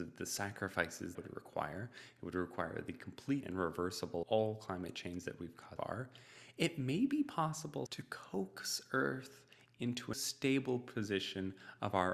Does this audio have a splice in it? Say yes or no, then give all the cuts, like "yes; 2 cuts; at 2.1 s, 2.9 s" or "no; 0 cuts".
yes; 6 cuts; at 1.1 s, 3.4 s, 4.2 s, 5.8 s, 7.9 s, 10.1 s